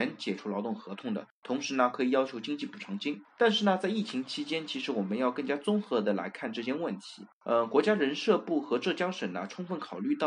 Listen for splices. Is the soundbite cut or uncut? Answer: cut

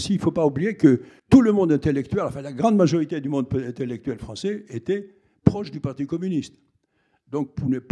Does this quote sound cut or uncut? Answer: cut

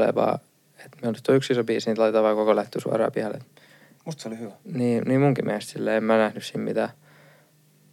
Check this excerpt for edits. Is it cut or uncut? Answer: uncut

